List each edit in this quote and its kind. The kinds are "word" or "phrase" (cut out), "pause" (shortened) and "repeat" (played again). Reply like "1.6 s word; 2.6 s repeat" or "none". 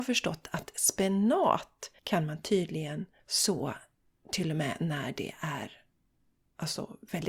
2.0 s pause; 3.2 s pause